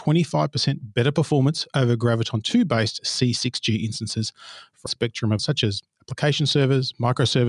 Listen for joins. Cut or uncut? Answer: cut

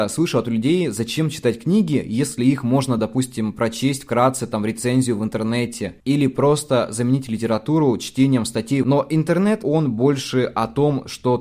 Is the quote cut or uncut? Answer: uncut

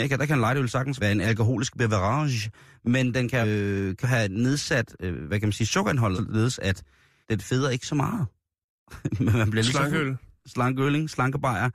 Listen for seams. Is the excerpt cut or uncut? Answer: cut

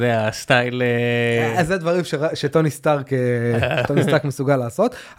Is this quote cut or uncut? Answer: uncut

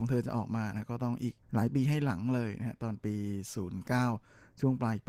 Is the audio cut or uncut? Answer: cut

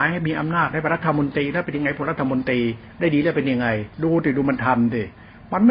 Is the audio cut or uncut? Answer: cut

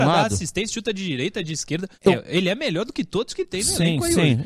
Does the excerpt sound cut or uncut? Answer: cut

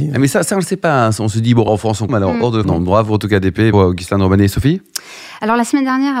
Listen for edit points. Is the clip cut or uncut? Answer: cut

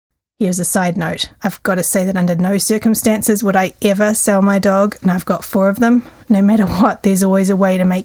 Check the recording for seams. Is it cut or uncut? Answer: uncut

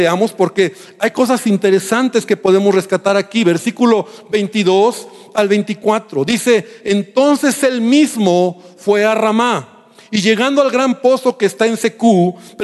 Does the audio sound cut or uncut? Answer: uncut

